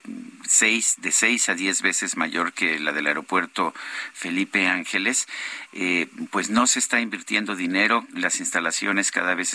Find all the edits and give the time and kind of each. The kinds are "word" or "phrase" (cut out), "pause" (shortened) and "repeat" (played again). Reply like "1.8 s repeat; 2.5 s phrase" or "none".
none